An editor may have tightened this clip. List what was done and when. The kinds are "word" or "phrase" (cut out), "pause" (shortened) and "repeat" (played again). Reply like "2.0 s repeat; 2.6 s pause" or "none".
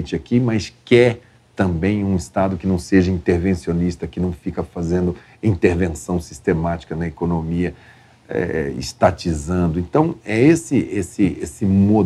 none